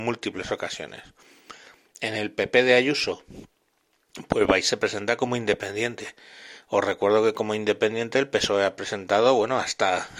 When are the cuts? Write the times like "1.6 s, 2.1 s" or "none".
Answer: none